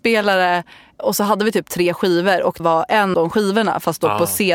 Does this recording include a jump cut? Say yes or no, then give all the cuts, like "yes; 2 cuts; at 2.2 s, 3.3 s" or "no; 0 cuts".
yes; 2 cuts; at 2.6 s, 3.1 s